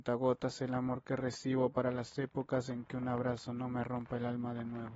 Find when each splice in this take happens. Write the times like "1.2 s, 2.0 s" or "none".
none